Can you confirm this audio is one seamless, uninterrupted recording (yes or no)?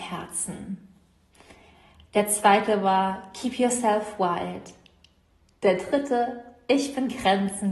yes